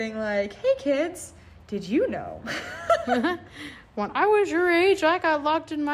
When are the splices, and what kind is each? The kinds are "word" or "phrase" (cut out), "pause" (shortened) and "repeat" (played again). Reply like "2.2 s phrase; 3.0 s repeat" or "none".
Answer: none